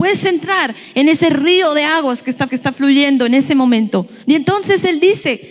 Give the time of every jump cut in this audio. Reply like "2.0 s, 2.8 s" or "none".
2.5 s, 4.2 s